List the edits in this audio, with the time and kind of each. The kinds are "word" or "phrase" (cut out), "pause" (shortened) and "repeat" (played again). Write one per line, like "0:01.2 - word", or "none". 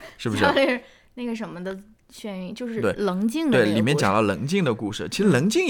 none